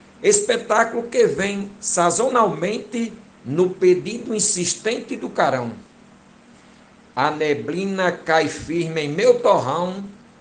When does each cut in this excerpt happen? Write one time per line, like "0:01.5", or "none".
none